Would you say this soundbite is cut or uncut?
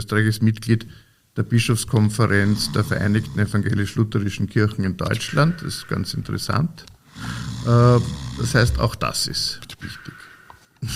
uncut